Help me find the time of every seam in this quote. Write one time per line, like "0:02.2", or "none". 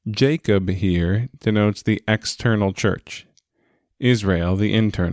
none